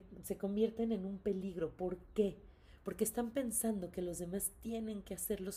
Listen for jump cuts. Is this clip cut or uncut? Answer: uncut